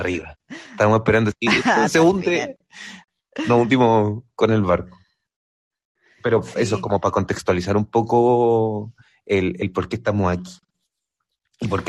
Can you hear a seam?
no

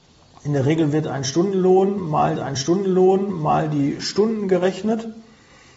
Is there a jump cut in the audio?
yes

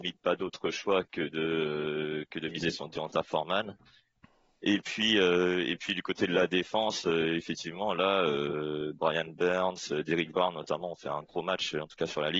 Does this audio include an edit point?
no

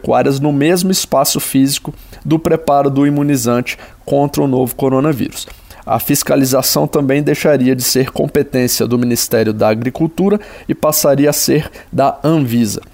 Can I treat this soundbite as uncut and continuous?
yes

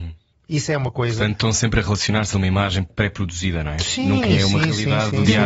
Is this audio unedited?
no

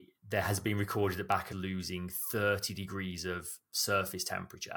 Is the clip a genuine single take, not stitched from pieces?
no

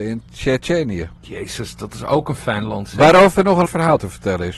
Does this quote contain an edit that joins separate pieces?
yes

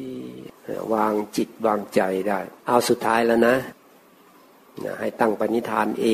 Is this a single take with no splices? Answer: no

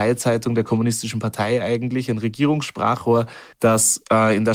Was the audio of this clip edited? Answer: yes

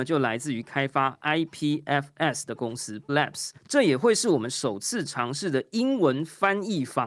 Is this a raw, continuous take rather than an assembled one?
no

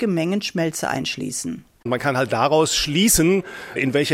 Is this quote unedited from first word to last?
yes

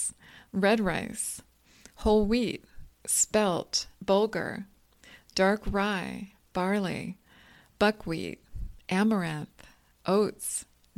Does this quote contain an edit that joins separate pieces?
yes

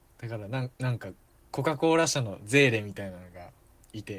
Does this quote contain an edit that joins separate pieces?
no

